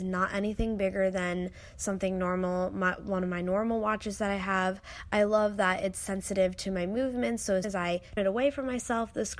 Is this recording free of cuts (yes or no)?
no